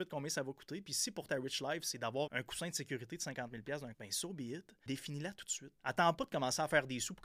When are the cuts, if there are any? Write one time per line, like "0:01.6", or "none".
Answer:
0:01.3
0:02.3
0:03.9
0:04.9
0:05.8

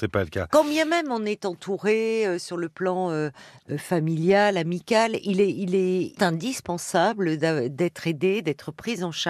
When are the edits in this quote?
0:06.2

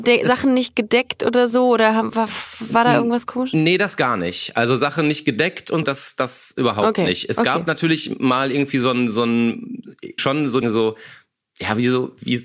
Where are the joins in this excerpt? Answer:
0:05.8
0:10.2
0:10.6

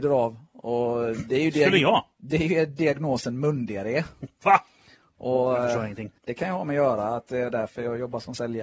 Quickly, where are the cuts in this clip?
0:06.2

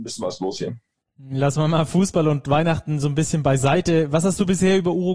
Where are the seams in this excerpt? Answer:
none

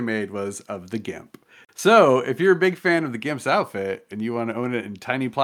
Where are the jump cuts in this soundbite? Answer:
none

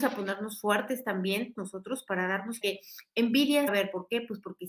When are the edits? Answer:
0:01.6
0:02.6
0:03.7

